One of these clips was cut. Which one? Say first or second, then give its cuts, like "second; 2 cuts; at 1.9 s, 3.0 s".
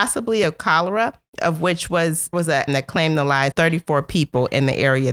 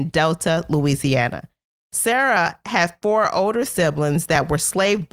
first; 4 cuts; at 1.3 s, 2.3 s, 2.7 s, 3.5 s